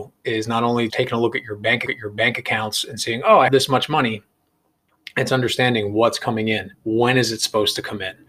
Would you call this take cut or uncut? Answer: cut